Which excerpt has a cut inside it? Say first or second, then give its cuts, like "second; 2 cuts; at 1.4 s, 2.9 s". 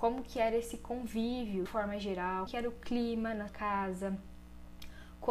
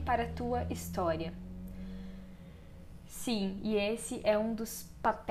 first; 3 cuts; at 1.7 s, 2.5 s, 3.5 s